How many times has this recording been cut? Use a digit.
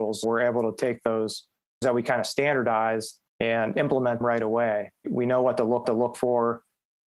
4